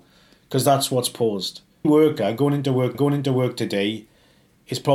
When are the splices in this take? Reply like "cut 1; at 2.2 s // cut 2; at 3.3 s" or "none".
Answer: cut 1; at 1.8 s // cut 2; at 2.9 s